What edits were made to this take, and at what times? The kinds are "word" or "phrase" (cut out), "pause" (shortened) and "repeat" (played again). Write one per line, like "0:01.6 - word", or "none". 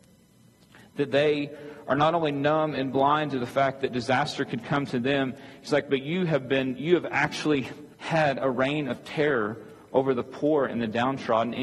0:07.9 - pause

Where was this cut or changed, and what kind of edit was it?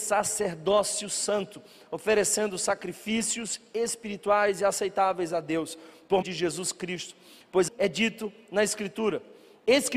0:06.2 - word
0:07.7 - word

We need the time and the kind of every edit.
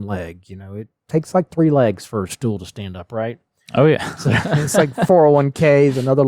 none

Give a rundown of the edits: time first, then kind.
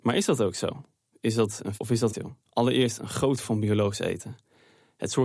0:01.7 - word
0:02.1 - phrase
0:02.4 - pause
0:03.4 - word

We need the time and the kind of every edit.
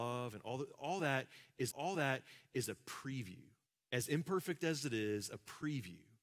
0:01.7 - repeat
0:03.7 - pause

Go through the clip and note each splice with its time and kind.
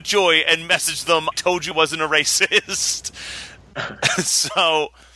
0:01.3 - word
0:01.7 - word

